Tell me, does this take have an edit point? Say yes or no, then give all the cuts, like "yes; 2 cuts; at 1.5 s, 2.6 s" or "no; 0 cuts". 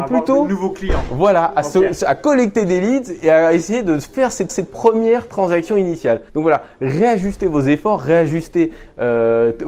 yes; 2 cuts; at 4.5 s, 6.3 s